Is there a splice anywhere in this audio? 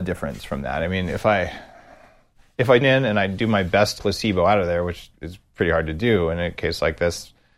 yes; 2 cuts; at 2.8 s, 4.0 s

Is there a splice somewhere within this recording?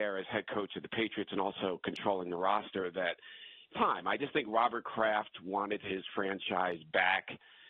yes; 2 cuts; at 3.7 s, 4.2 s

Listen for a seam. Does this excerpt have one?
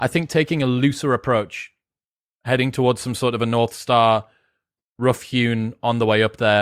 no; 0 cuts

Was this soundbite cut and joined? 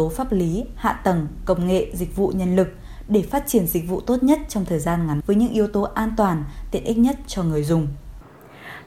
yes; 1 cut; at 5.2 s

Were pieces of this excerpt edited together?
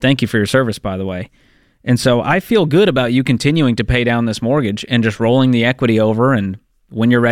no; 0 cuts

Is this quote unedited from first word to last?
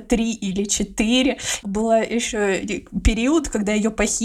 no; 1 cut; at 1.6 s

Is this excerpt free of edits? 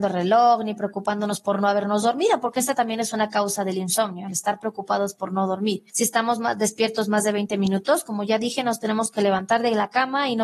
yes; 0 cuts

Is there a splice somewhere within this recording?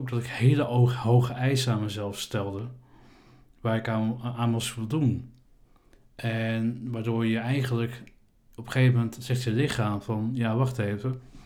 no; 0 cuts

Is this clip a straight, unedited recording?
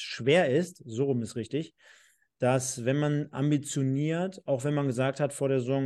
yes; 0 cuts

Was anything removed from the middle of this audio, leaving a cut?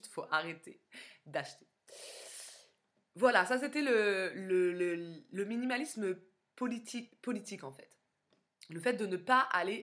no; 0 cuts

